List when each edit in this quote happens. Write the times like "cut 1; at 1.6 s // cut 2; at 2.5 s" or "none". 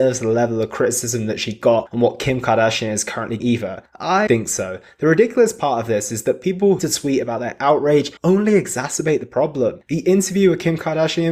cut 1; at 3.4 s // cut 2; at 4.3 s // cut 3; at 6.8 s // cut 4; at 8.2 s